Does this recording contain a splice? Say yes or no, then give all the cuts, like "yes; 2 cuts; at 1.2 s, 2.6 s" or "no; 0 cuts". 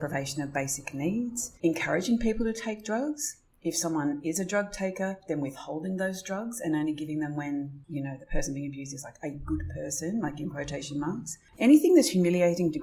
no; 0 cuts